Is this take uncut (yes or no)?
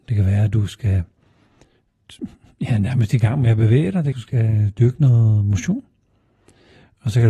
no